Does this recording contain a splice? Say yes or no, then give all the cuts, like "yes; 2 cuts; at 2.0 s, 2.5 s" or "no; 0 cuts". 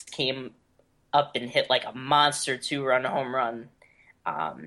no; 0 cuts